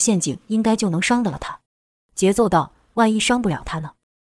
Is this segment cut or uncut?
cut